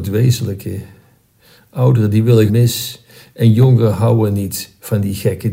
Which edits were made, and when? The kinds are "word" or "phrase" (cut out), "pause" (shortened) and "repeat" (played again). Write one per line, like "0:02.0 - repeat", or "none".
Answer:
0:02.5 - phrase